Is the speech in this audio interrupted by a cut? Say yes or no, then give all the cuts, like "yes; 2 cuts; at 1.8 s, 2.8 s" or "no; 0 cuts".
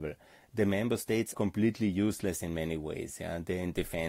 yes; 2 cuts; at 1.3 s, 2.4 s